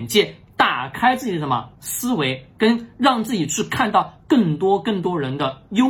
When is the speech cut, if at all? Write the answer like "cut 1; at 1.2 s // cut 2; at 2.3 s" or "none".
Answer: cut 1; at 1.7 s